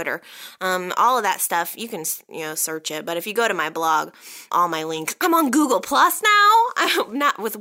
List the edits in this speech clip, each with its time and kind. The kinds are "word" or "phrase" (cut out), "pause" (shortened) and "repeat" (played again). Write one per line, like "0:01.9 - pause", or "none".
0:04.5 - word